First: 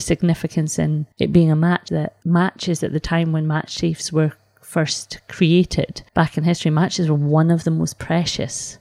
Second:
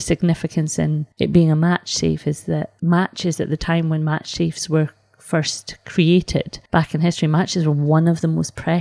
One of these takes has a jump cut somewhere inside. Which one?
first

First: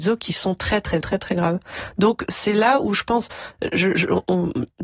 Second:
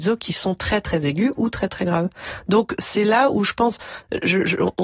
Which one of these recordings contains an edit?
first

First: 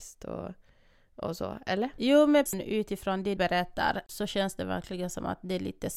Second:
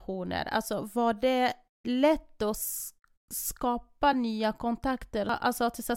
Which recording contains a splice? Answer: first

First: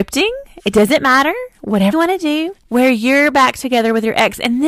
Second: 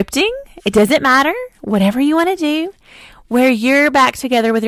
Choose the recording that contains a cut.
first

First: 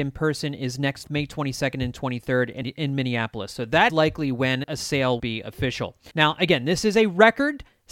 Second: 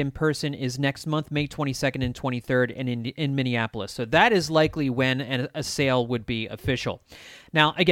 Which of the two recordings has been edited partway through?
first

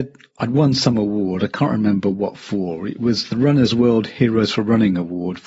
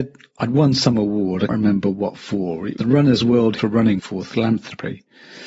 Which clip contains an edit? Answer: second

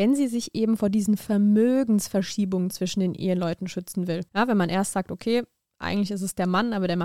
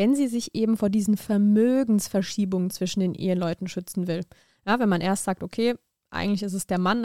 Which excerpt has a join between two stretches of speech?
first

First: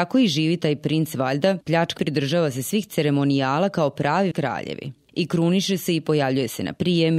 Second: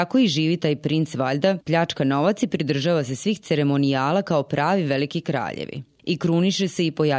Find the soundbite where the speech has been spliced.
first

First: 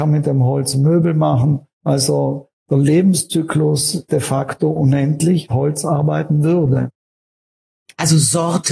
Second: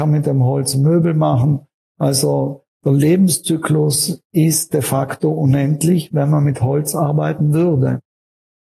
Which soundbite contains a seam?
first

